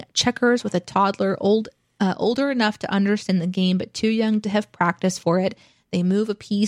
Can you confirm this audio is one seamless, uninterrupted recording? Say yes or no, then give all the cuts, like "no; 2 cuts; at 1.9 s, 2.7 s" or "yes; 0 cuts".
yes; 0 cuts